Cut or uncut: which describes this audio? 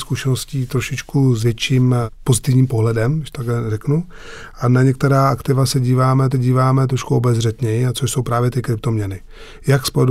cut